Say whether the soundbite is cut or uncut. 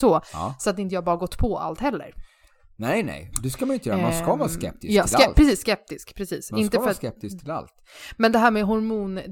uncut